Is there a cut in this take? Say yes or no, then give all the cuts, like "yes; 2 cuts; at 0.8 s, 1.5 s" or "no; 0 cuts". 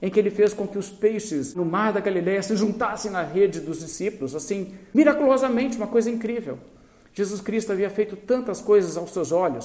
no; 0 cuts